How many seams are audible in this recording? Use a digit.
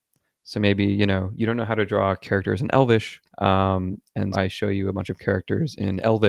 2